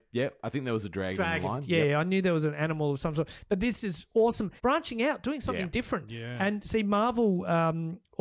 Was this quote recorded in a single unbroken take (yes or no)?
no